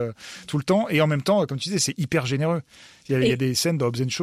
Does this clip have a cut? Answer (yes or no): no